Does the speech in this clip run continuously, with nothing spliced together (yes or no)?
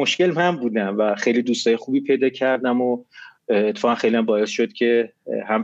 yes